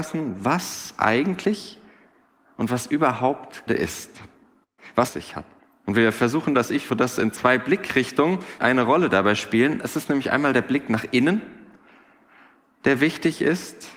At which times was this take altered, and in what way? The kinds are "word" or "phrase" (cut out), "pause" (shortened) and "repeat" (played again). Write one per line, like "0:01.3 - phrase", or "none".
0:03.7 - word
0:05.1 - phrase
0:05.6 - pause
0:06.9 - word
0:08.6 - word